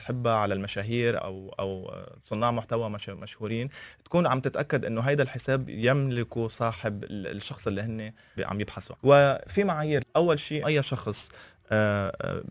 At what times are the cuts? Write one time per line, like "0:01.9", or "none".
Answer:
0:01.2
0:08.4
0:08.9
0:10.0
0:10.6